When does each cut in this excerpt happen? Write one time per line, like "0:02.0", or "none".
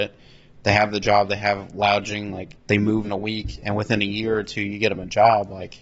0:03.0